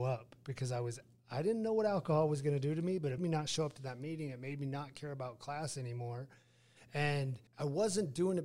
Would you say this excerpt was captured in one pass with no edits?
no; 2 cuts; at 3.2 s, 7.5 s

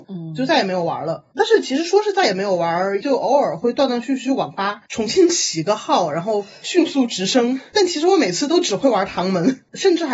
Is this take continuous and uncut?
no; 1 cut; at 3.0 s

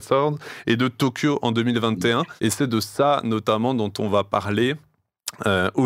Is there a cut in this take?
yes; 1 cut; at 2.4 s

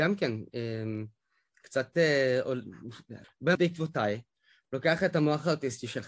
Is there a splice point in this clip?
yes; 2 cuts; at 3.2 s, 3.5 s

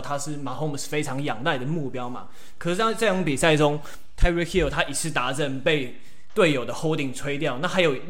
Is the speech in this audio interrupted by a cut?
no; 0 cuts

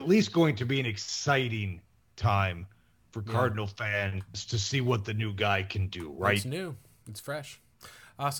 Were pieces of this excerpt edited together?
no; 0 cuts

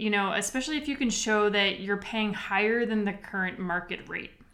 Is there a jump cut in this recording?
no; 0 cuts

